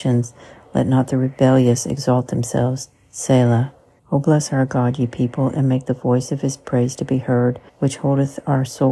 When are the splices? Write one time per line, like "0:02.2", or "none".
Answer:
0:04.0
0:07.7